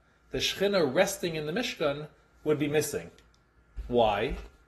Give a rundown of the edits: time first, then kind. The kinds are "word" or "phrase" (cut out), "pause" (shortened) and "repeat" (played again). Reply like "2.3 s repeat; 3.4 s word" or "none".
none